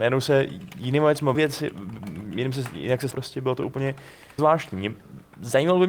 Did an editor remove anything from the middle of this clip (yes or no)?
yes